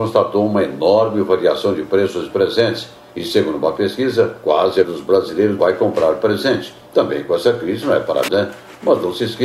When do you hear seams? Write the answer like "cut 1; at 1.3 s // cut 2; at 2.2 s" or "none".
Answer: cut 1; at 4.8 s // cut 2; at 5.6 s // cut 3; at 8.3 s